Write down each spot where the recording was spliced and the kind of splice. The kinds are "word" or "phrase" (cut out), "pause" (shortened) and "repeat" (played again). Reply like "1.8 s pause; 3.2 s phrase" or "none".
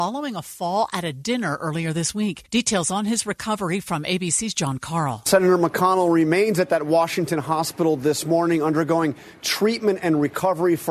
2.4 s pause